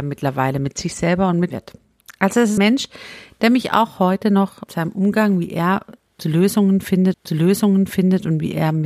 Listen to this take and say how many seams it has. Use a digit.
4